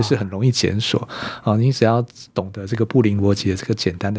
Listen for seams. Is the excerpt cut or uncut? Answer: cut